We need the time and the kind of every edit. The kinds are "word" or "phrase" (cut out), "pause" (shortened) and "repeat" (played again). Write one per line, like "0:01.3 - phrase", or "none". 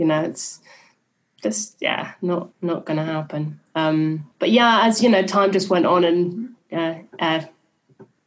0:02.5 - pause
0:04.3 - pause